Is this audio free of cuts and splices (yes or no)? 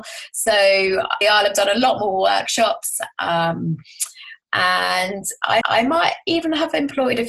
no